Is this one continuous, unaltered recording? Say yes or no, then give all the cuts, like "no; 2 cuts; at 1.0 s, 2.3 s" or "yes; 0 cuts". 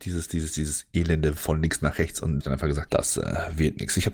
no; 3 cuts; at 1.4 s, 2.4 s, 2.9 s